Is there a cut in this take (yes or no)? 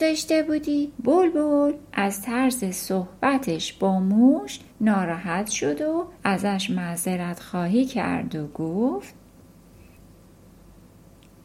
yes